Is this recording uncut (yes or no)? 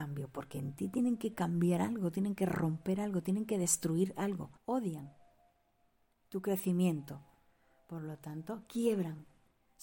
no